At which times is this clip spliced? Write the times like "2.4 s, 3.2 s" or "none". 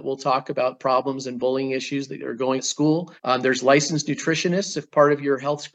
2.6 s, 3.2 s